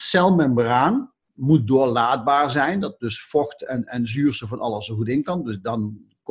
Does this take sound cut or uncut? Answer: uncut